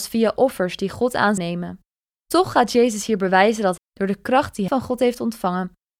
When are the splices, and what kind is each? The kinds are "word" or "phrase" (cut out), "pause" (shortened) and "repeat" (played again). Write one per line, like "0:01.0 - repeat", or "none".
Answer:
0:01.4 - word
0:03.8 - word
0:04.7 - word